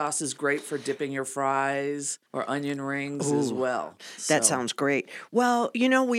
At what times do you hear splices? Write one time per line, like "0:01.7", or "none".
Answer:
0:02.2